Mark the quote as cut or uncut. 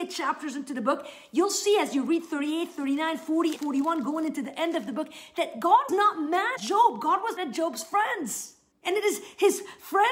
cut